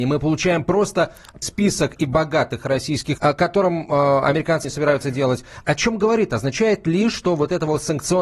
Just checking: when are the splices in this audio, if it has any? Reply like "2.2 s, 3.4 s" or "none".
1.4 s, 2.0 s, 3.2 s, 4.6 s, 5.7 s